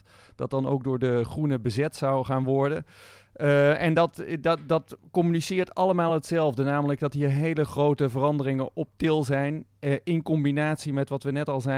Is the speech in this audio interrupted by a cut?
no; 0 cuts

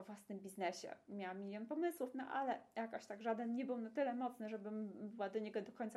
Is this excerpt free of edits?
yes; 0 cuts

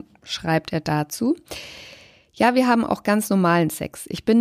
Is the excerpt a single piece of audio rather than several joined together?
yes; 0 cuts

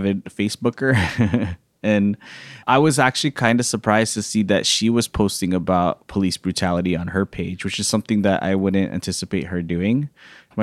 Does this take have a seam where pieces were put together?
yes; 1 cut; at 2.6 s

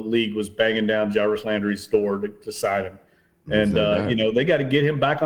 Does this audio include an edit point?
no; 0 cuts

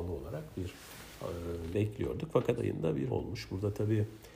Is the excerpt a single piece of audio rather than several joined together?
no; 3 cuts; at 1.7 s, 2.6 s, 3.1 s

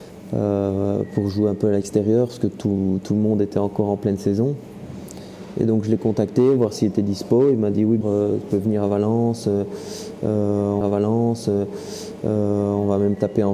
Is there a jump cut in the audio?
yes; 2 cuts; at 8.0 s, 10.8 s

